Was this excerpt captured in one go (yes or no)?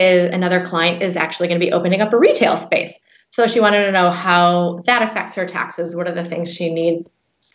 yes